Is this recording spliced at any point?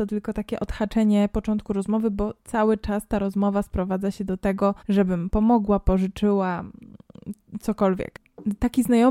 yes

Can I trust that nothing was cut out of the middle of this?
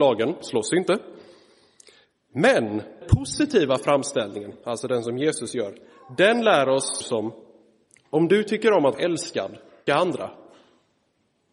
no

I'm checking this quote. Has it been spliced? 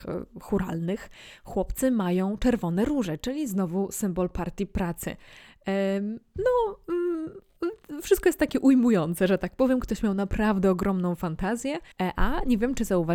yes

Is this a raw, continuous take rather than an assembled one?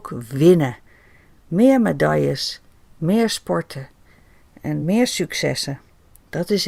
yes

